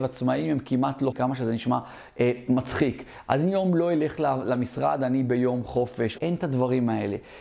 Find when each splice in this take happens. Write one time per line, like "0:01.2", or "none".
0:01.1
0:06.2